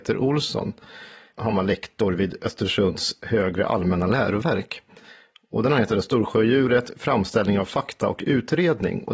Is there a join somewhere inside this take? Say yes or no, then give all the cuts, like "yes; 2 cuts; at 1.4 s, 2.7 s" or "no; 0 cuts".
no; 0 cuts